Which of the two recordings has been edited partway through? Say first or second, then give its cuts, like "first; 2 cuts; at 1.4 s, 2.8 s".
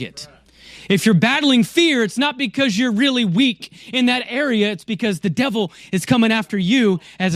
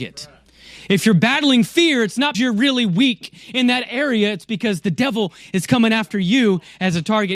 second; 1 cut; at 2.3 s